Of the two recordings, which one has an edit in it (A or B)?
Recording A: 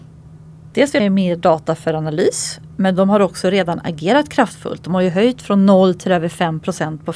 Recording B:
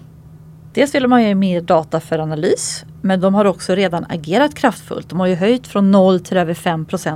A